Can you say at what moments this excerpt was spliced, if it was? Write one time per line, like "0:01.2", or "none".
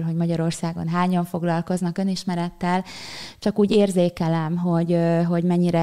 none